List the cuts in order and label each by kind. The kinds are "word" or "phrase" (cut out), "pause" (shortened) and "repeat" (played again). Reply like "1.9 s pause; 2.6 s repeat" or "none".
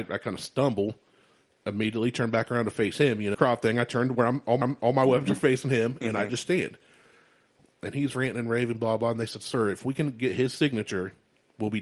3.3 s phrase; 4.6 s repeat